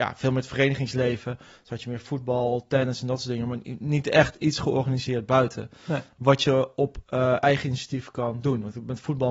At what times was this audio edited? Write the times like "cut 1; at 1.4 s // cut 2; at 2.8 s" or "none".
none